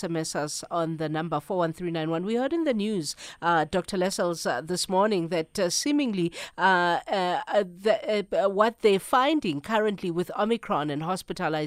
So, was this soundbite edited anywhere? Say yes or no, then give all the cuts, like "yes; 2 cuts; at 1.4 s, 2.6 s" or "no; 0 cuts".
no; 0 cuts